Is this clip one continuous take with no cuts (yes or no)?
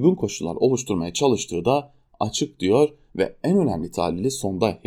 yes